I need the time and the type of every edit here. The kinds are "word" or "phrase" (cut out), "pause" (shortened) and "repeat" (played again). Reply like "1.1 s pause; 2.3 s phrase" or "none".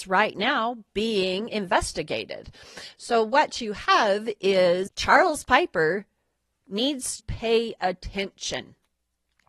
4.9 s word; 7.2 s word

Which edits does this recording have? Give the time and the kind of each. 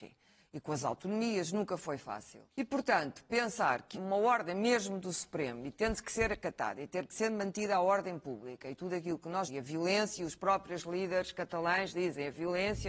2.5 s pause; 3.9 s word; 9.5 s word

